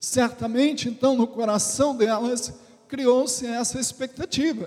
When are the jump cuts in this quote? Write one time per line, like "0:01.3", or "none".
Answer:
none